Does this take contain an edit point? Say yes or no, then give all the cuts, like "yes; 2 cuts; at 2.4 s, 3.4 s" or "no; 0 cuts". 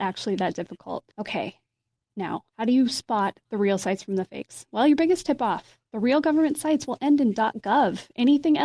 yes; 2 cuts; at 1.1 s, 2.5 s